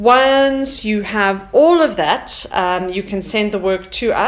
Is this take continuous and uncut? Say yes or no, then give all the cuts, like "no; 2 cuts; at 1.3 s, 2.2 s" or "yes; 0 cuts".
yes; 0 cuts